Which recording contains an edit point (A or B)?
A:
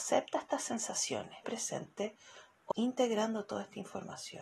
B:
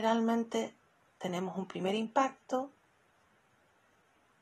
A